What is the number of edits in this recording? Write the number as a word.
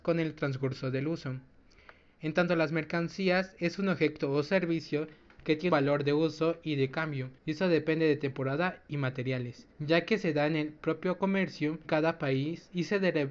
four